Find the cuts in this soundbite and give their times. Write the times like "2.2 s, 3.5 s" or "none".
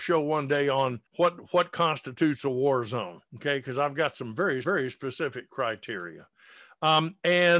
1.1 s, 3.3 s, 4.6 s